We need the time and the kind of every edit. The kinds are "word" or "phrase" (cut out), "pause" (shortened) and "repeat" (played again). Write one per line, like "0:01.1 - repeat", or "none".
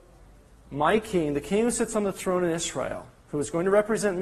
none